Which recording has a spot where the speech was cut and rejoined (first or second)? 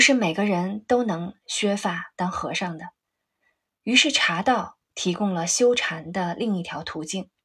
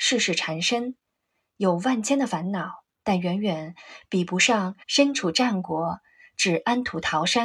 second